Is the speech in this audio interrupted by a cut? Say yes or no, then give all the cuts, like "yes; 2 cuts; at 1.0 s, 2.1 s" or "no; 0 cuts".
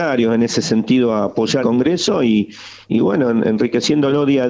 yes; 2 cuts; at 1.6 s, 2.9 s